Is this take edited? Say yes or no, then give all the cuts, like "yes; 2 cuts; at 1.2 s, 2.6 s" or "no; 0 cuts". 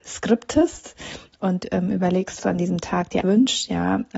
yes; 2 cuts; at 2.4 s, 3.2 s